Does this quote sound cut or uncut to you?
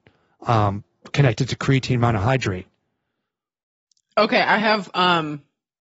uncut